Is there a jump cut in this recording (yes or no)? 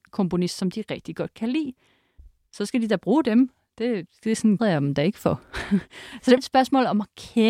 yes